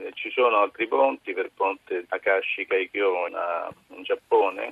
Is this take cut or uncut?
cut